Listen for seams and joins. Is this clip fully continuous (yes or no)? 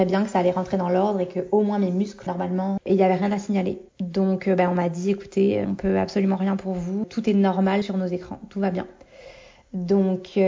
no